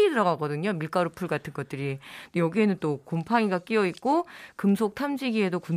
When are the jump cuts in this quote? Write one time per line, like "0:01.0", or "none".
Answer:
none